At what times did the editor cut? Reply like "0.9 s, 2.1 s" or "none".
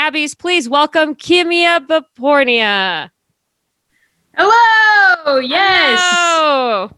none